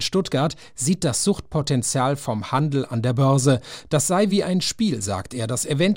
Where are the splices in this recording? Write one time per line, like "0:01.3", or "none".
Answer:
none